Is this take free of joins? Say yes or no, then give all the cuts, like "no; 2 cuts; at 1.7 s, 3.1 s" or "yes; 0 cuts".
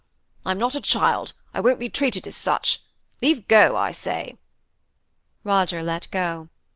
yes; 0 cuts